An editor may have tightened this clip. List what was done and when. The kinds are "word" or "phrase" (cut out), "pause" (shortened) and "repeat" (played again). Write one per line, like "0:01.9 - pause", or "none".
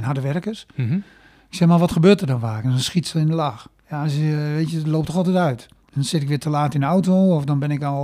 none